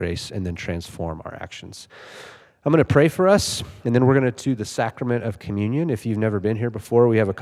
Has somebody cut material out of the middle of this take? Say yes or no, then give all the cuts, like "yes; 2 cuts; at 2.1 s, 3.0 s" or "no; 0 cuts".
no; 0 cuts